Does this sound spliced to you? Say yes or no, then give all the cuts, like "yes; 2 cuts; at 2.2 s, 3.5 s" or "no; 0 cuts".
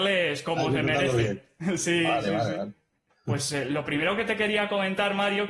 no; 0 cuts